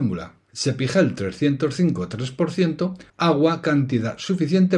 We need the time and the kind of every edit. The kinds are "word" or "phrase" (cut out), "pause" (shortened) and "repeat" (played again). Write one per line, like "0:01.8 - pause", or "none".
0:03.1 - pause